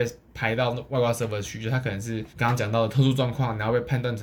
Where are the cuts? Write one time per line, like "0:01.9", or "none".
0:02.3